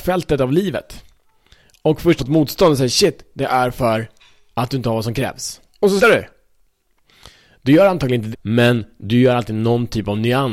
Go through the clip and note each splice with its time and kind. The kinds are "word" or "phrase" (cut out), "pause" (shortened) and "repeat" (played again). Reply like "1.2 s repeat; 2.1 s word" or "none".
2.2 s word; 6.0 s word; 8.3 s word